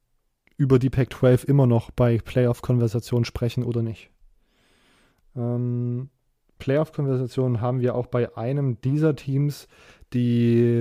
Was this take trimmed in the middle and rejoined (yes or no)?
no